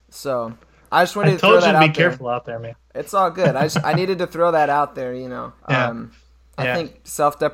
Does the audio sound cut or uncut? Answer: cut